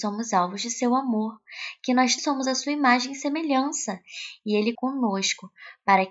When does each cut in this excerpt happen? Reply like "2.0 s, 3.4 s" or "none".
2.2 s, 4.7 s